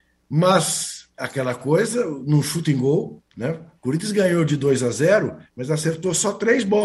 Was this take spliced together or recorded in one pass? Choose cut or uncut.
cut